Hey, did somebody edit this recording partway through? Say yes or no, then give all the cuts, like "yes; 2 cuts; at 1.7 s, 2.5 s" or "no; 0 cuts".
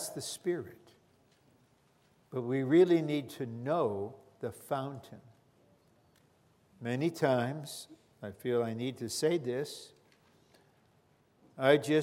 no; 0 cuts